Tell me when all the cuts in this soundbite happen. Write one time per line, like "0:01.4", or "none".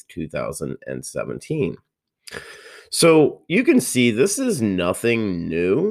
none